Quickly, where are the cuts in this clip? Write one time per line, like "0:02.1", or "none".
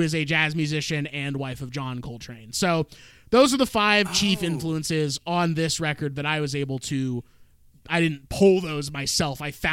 none